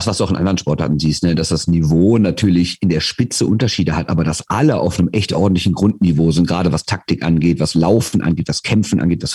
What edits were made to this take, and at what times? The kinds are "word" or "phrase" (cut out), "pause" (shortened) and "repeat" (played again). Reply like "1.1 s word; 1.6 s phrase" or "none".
none